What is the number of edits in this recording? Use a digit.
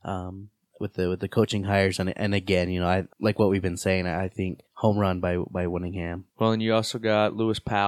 3